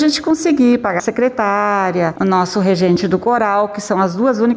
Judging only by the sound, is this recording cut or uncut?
cut